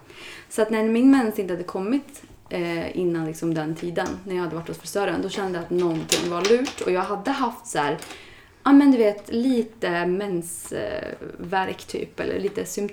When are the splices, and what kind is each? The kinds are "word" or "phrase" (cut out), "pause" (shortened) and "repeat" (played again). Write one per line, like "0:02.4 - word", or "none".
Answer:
none